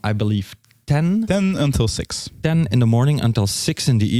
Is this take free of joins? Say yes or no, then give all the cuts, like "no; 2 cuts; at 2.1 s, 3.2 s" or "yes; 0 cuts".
yes; 0 cuts